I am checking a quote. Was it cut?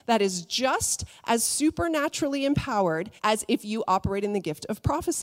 yes; 1 cut; at 3.2 s

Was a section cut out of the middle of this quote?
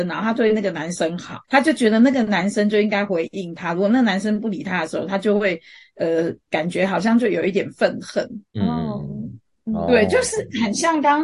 yes; 2 cuts; at 1.4 s, 8.5 s

